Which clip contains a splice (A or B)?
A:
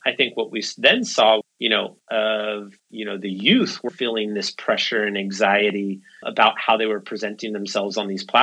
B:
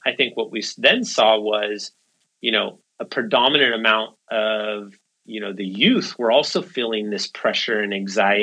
A